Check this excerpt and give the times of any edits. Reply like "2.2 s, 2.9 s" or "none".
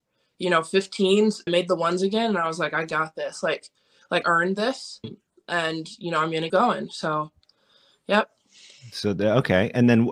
1.5 s, 4.2 s, 5.0 s, 6.5 s